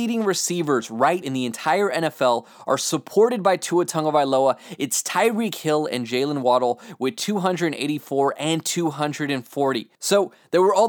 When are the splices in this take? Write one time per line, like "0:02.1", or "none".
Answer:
0:01.2
0:09.9

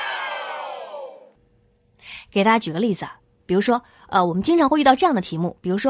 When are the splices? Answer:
none

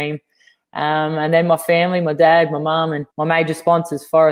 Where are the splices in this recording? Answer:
0:03.1

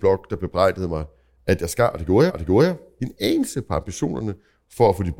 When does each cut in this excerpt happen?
0:02.3

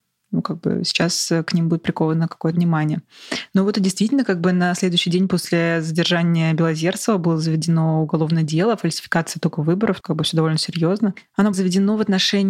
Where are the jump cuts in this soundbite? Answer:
0:02.5
0:10.0
0:11.5

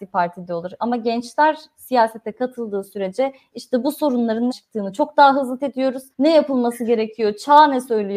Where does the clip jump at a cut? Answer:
0:04.5
0:05.6
0:06.1

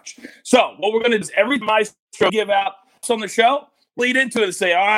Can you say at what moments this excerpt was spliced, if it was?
0:01.2
0:01.6
0:02.3
0:03.0
0:04.0

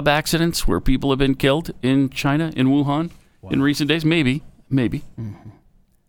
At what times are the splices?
none

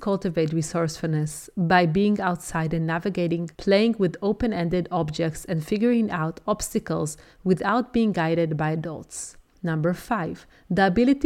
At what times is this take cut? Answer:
0:03.5
0:09.5

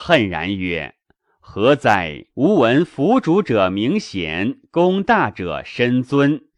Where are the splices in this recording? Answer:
0:02.3

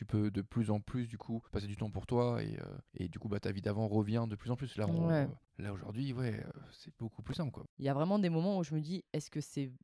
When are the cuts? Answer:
0:01.5
0:02.9
0:05.5
0:07.7

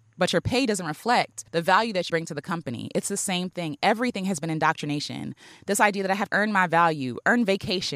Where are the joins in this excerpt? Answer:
0:01.5
0:02.1
0:06.3

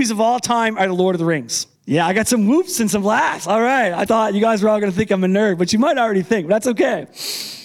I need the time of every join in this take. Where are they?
0:01.7
0:04.1

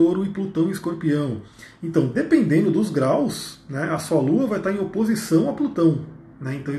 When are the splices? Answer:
none

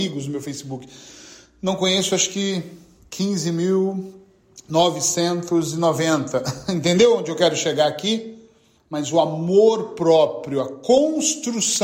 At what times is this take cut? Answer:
none

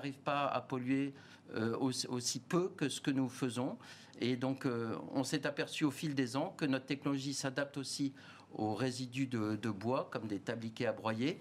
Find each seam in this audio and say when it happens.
none

